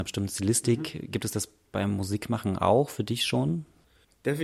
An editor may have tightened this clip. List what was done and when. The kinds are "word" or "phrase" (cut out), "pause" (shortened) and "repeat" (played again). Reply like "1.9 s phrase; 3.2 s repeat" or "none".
none